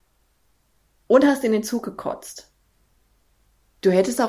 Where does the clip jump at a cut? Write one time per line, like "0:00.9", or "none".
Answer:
none